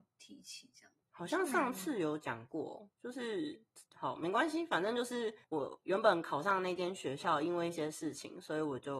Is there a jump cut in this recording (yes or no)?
yes